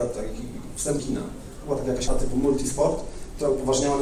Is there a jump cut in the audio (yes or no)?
yes